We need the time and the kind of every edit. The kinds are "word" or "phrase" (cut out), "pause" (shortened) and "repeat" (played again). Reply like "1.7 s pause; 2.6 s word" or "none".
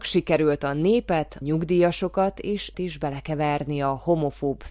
1.4 s word; 2.7 s word